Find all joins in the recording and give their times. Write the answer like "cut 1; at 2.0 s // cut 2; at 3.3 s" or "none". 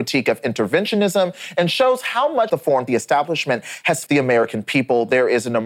cut 1; at 2.5 s // cut 2; at 2.9 s // cut 3; at 4.1 s